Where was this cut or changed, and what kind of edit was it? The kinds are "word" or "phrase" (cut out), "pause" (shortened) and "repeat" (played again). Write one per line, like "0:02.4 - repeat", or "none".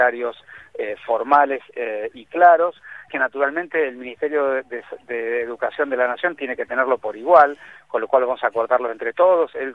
0:03.1 - word
0:07.0 - phrase